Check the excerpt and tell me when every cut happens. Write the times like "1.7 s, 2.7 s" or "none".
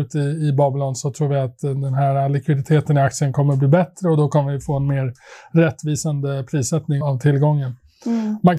7.0 s